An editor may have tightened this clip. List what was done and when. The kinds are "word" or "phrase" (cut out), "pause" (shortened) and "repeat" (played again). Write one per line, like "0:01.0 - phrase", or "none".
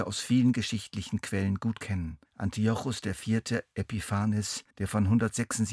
0:02.3 - pause
0:04.7 - pause